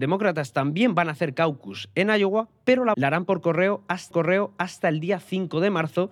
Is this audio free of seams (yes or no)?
no